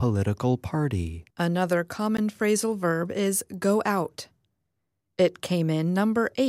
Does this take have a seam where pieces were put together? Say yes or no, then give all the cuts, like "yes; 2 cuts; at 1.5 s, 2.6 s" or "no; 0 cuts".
yes; 1 cut; at 1.3 s